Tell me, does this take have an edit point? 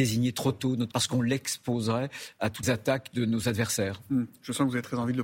yes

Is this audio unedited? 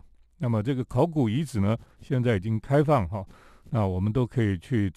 yes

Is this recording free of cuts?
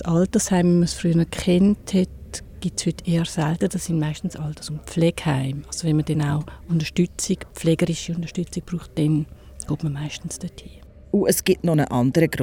no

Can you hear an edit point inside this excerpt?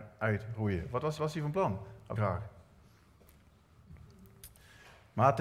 yes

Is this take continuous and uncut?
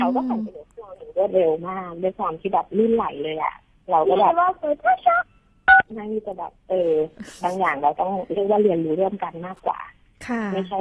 yes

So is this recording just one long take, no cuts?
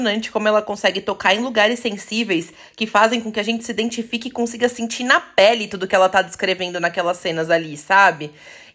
yes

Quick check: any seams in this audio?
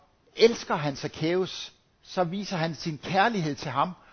no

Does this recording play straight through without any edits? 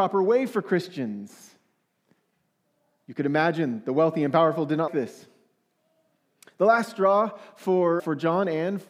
no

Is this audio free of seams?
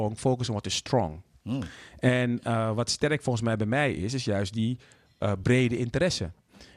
yes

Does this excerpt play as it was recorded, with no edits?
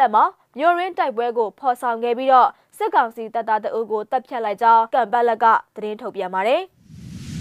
no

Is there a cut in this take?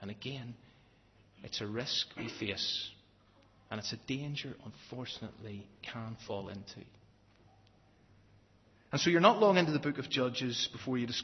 yes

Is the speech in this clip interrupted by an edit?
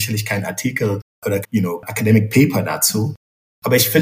yes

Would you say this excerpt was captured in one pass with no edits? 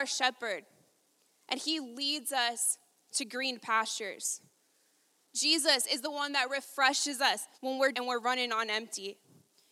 no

